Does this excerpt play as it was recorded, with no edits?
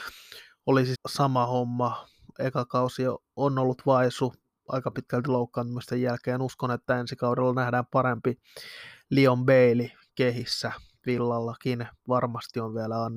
no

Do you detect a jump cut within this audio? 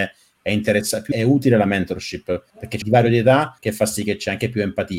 yes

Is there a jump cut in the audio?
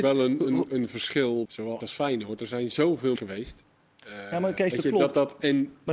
yes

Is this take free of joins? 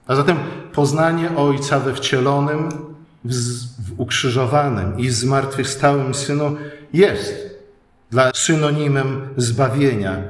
no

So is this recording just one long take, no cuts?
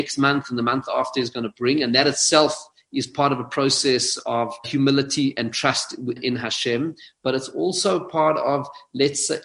no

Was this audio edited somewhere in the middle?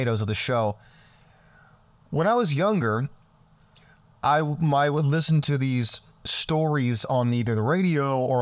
no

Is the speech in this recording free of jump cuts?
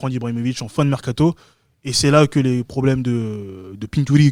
yes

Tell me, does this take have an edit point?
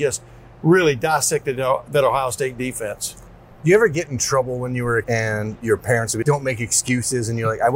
yes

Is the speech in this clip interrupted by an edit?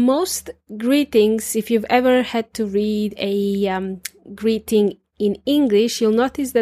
no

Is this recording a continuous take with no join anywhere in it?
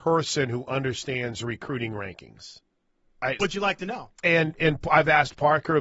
no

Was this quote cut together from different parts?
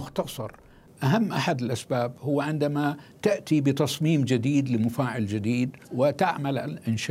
yes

